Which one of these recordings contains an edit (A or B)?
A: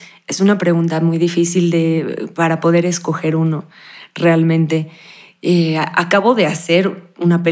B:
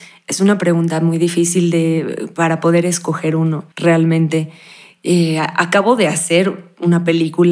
B